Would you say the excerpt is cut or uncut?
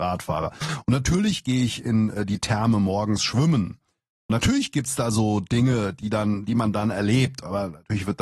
uncut